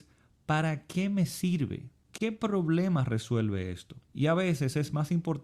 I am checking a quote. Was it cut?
yes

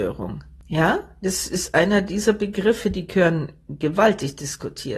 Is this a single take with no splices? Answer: yes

